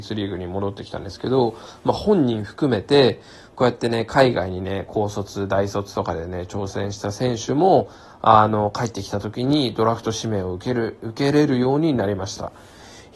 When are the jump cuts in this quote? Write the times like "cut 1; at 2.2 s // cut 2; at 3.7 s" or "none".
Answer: none